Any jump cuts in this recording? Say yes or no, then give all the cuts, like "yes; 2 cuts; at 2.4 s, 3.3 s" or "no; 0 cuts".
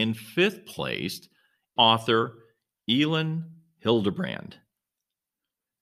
yes; 1 cut; at 1.8 s